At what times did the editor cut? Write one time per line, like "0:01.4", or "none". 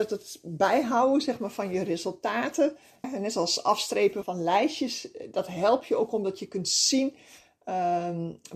0:03.0
0:04.2